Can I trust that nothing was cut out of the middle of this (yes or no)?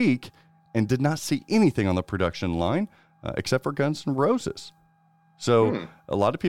yes